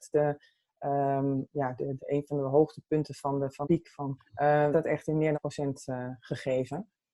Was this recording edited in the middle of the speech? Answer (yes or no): yes